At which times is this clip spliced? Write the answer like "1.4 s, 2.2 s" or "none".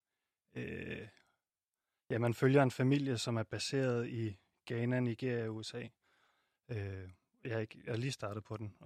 none